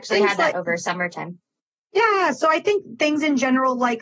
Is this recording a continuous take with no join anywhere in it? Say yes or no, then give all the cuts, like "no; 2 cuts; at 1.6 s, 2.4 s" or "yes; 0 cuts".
yes; 0 cuts